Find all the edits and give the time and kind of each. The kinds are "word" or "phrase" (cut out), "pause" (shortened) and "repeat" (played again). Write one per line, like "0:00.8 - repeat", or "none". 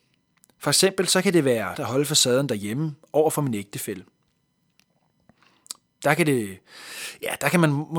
0:01.7 - word